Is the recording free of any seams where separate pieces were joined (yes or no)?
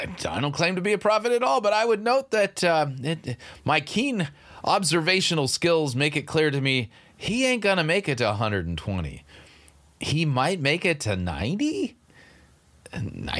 yes